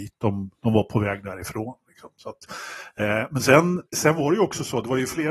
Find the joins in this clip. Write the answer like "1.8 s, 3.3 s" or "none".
3.9 s